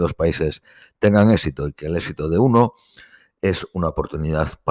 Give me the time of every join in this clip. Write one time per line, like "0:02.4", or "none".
none

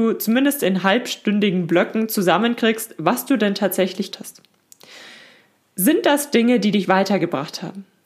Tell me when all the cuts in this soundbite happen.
0:04.1
0:06.8

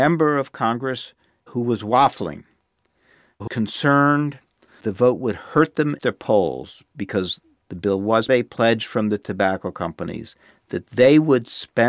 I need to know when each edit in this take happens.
0:03.5
0:04.8
0:06.0
0:08.3

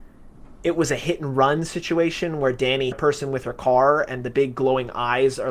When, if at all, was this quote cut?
0:02.9

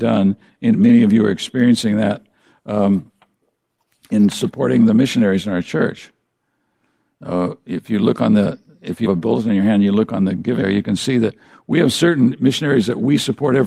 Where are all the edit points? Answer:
0:09.1
0:10.6

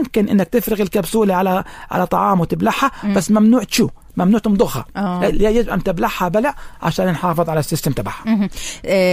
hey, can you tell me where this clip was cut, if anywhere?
none

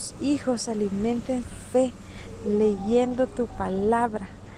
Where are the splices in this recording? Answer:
0:01.4

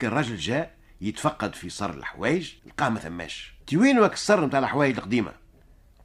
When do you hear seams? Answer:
0:02.6
0:03.6

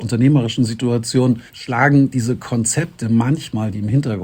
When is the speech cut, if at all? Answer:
0:01.5

